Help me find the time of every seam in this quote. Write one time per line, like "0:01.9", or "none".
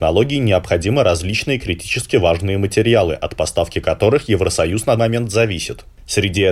0:05.0